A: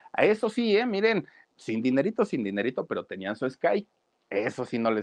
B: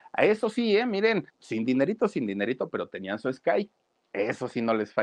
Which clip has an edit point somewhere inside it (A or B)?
B